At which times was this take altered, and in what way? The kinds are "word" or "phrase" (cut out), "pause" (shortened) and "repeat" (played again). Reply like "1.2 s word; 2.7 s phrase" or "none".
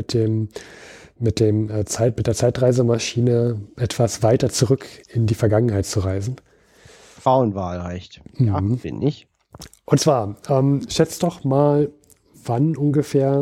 none